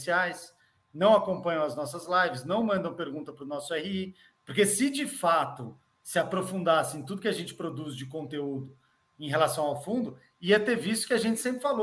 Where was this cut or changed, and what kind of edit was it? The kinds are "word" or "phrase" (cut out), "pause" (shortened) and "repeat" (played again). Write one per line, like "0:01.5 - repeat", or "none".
none